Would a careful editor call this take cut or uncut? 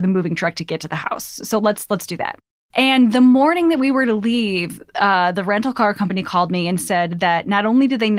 uncut